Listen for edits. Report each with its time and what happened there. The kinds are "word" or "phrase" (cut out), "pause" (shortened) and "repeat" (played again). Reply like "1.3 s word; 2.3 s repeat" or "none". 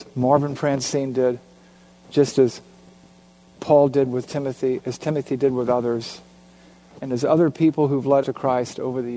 8.2 s word